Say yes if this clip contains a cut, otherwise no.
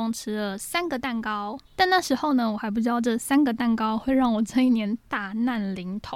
yes